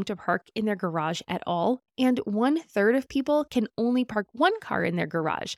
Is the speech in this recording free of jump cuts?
no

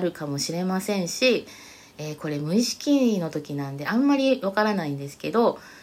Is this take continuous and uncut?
yes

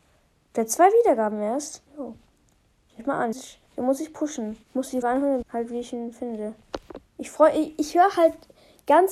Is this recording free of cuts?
no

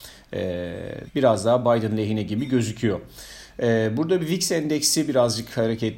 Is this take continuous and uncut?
no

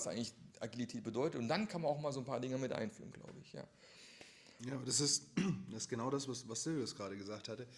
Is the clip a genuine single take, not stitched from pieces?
yes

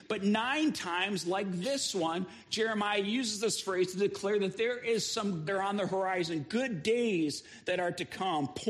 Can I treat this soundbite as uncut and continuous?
no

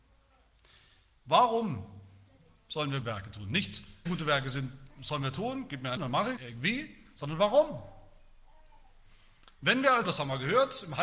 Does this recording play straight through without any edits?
no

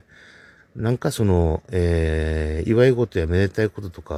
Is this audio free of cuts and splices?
yes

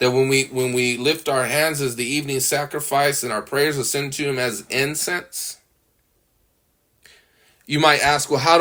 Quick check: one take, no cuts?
yes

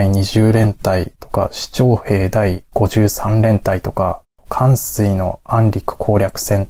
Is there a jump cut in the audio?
no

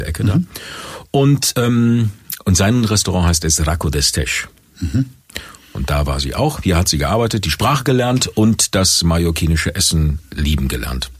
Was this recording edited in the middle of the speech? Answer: no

